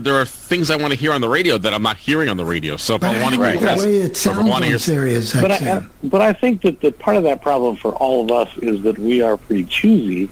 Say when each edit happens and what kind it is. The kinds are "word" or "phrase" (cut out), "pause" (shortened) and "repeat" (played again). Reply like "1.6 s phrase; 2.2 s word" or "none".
3.6 s word